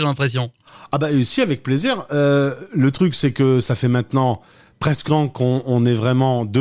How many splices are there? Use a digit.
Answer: 1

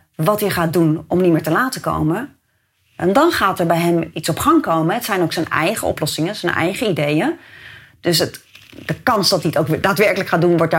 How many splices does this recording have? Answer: 0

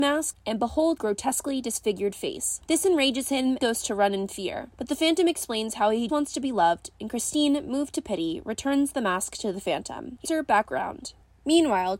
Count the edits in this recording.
5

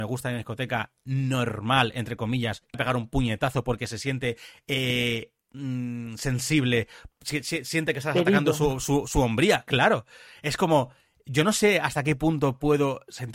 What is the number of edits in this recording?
1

